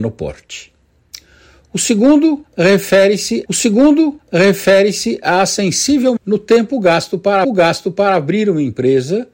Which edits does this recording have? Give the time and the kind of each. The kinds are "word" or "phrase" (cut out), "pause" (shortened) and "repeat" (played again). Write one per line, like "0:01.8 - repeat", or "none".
0:03.5 - repeat
0:06.2 - word
0:07.4 - repeat